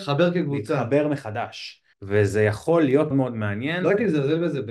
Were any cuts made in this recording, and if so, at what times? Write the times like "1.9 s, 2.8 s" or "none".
1.9 s, 3.1 s